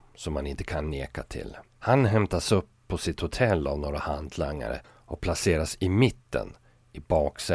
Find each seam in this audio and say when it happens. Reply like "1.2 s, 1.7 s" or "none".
1.7 s, 4.8 s